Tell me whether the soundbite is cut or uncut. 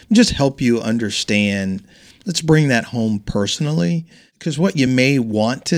uncut